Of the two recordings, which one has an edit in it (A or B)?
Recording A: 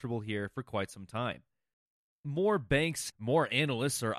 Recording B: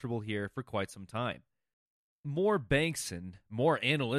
A